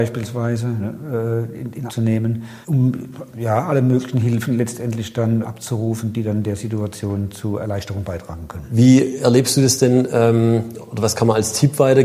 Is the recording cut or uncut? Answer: cut